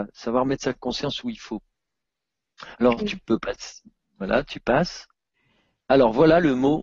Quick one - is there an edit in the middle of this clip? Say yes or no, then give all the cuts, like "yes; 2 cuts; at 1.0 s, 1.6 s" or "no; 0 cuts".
no; 0 cuts